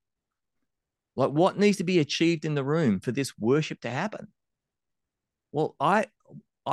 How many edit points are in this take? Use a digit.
0